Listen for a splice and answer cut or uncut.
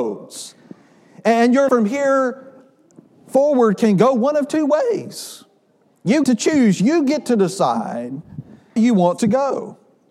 cut